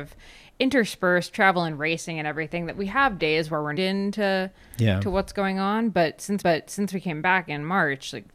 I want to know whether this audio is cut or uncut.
cut